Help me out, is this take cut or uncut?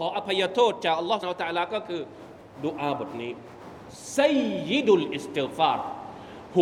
cut